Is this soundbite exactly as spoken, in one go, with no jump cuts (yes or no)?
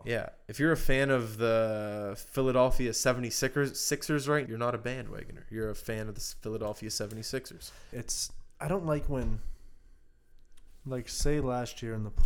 no